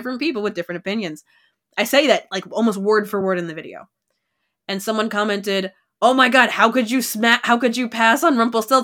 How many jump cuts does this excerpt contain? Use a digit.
0